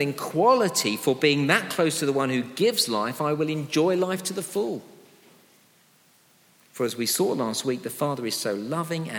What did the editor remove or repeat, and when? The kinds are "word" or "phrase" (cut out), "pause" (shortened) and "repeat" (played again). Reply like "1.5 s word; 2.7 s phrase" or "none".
none